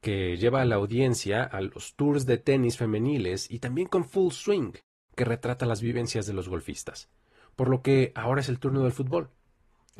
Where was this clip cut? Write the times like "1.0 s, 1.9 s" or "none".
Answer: none